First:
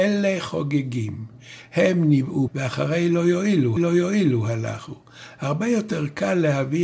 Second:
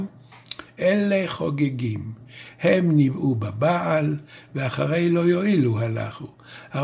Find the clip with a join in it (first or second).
first